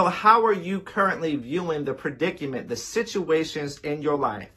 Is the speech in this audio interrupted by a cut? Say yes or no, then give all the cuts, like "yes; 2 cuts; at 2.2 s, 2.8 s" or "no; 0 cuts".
no; 0 cuts